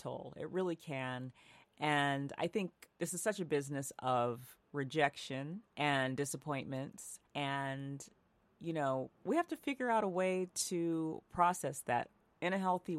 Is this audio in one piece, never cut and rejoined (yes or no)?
no